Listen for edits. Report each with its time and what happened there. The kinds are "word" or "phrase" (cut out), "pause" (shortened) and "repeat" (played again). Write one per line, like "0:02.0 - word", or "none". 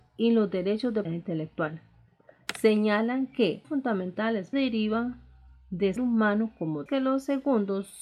0:01.0 - word
0:03.6 - phrase
0:04.5 - word
0:06.0 - word
0:06.9 - phrase